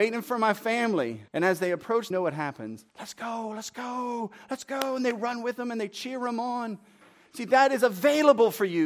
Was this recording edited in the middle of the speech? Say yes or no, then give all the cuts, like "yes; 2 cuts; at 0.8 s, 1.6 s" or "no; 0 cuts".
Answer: yes; 3 cuts; at 1.3 s, 2.1 s, 2.9 s